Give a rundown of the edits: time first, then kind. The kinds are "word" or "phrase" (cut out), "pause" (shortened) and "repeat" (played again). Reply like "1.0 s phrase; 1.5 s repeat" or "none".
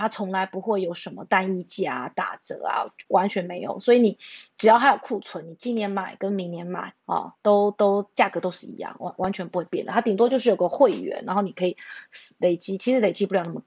4.5 s pause; 7.0 s pause; 7.3 s pause

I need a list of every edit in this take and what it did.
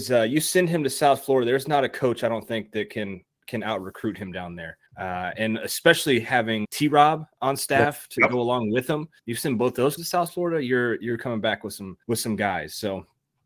4.9 s pause; 6.6 s word; 7.3 s pause; 9.2 s pause; 10.0 s word; 12.0 s pause

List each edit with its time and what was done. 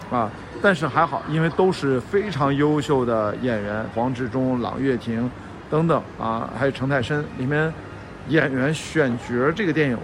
3.9 s phrase

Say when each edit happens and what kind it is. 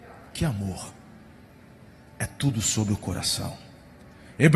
none

